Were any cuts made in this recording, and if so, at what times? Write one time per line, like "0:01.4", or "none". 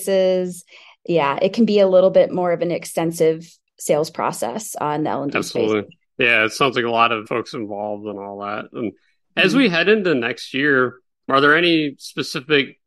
none